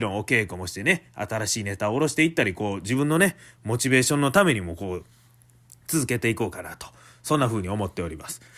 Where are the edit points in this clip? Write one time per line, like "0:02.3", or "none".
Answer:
none